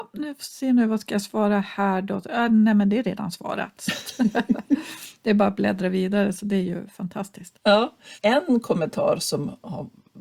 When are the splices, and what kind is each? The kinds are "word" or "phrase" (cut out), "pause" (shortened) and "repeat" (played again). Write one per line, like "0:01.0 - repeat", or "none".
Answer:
none